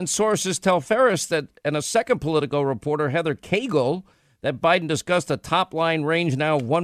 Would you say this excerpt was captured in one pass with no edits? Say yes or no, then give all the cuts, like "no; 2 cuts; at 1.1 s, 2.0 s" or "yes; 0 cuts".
yes; 0 cuts